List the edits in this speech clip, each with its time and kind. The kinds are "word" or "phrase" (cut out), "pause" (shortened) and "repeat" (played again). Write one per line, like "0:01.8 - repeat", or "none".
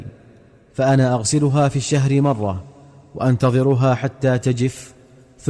none

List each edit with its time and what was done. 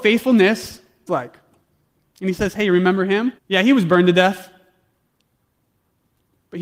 0:01.1 - word
0:03.4 - pause

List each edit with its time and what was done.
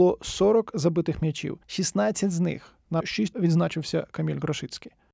0:01.6 - pause
0:03.0 - phrase
0:03.3 - word

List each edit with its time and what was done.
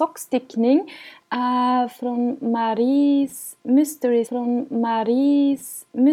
0:04.3 - repeat

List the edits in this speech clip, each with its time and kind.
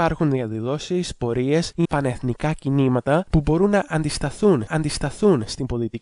0:01.8 - word
0:04.7 - repeat

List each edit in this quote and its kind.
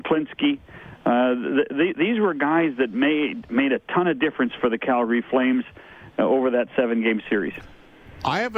none

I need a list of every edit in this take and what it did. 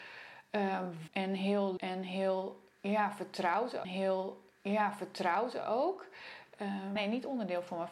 0:01.1 - word
0:01.8 - word
0:03.8 - repeat
0:07.0 - word

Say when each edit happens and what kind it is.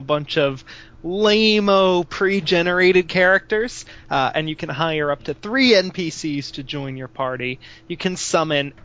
none

